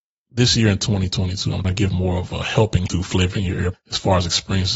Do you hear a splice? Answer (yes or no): yes